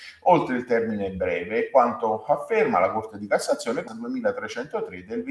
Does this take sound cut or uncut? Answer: cut